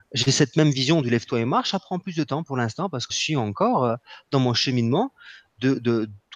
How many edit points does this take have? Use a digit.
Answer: 1